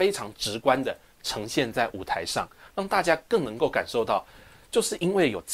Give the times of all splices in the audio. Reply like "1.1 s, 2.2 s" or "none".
none

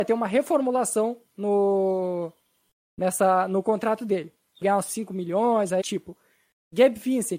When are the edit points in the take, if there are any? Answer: 1.3 s, 4.6 s, 5.8 s

